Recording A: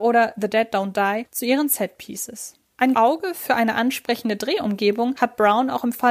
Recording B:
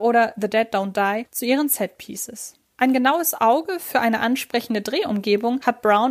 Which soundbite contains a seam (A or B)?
A